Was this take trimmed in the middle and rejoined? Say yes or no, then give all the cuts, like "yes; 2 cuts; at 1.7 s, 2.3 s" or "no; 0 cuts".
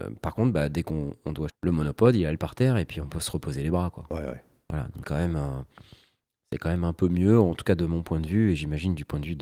yes; 3 cuts; at 1.5 s, 2.4 s, 5.0 s